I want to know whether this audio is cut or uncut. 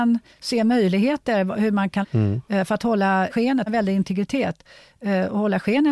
cut